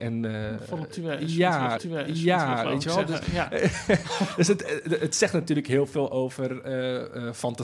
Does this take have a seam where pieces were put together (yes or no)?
yes